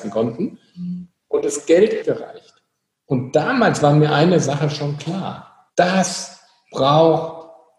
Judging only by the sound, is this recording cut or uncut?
cut